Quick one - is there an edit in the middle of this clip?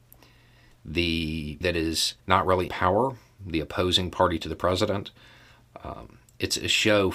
yes; 3 cuts; at 1.6 s, 2.2 s, 2.7 s

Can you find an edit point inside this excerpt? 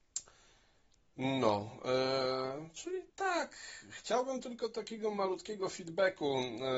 yes; 1 cut; at 3.1 s

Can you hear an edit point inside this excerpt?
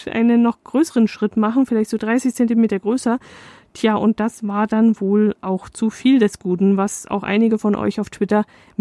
no; 0 cuts

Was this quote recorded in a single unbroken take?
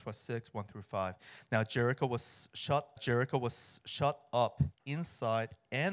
no; 1 cut; at 3.0 s

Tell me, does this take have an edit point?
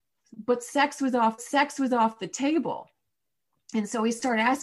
yes; 1 cut; at 1.4 s

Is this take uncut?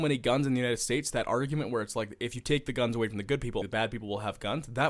no; 1 cut; at 3.6 s

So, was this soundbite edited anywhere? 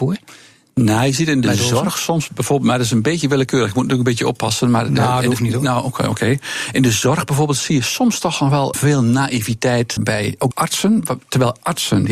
yes; 3 cuts; at 8.7 s, 10.0 s, 10.5 s

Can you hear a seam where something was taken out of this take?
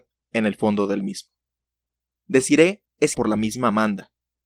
yes; 1 cut; at 3.1 s

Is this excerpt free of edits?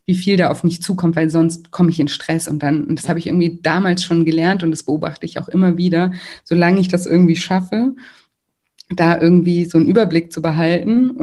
yes; 0 cuts

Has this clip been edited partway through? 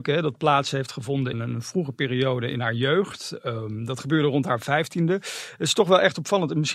yes; 1 cut; at 1.3 s

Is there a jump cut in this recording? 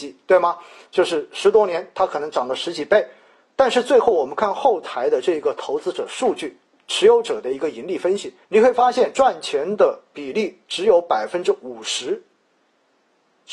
yes; 1 cut; at 8.4 s

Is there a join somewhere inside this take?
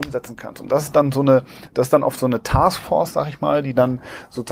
no; 0 cuts

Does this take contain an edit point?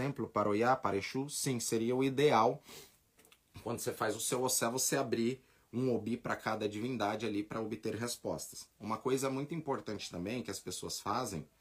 no; 0 cuts

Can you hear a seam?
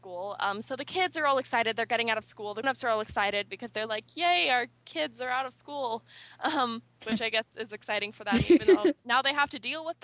yes; 1 cut; at 2.6 s

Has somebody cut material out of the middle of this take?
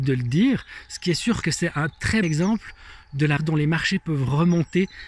yes; 3 cuts; at 1.4 s, 2.2 s, 3.4 s

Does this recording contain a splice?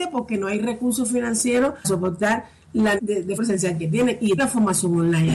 yes; 4 cuts; at 1.8 s, 3.0 s, 3.4 s, 4.4 s

